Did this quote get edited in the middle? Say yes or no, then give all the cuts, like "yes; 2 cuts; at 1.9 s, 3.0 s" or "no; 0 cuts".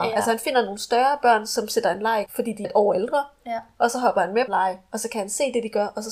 yes; 3 cuts; at 2.3 s, 2.6 s, 4.5 s